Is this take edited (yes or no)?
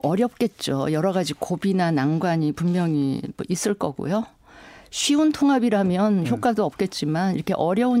no